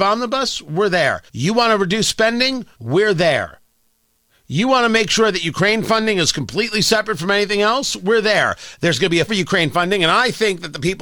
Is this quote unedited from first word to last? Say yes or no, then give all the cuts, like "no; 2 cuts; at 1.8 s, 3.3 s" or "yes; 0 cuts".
no; 3 cuts; at 1.3 s, 2.7 s, 9.3 s